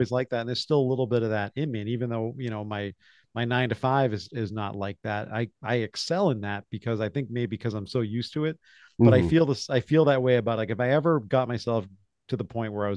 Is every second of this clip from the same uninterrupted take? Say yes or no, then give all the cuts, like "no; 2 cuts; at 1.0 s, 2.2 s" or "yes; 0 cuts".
yes; 0 cuts